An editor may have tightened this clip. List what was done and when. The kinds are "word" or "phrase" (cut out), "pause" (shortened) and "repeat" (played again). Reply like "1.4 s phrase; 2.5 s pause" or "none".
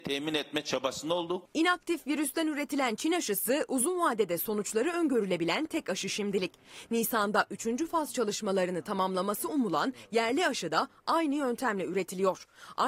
none